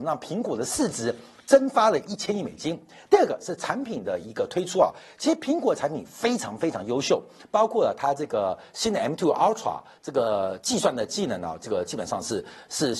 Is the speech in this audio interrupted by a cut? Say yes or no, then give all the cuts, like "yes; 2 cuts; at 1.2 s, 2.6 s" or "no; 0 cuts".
no; 0 cuts